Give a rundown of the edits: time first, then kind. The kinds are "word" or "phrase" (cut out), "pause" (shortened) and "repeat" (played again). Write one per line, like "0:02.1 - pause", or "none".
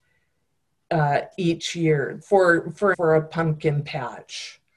0:02.2 - word
0:02.9 - word